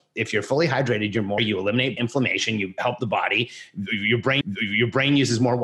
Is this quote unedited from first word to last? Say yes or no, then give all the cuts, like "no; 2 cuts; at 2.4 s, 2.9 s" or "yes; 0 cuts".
no; 3 cuts; at 1.4 s, 2.0 s, 4.4 s